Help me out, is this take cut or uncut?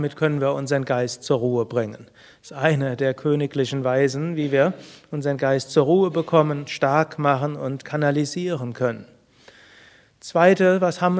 uncut